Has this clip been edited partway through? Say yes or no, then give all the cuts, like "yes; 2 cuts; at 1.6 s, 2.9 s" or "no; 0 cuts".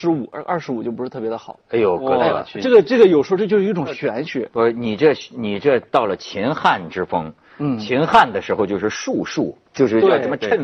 yes; 1 cut; at 9.7 s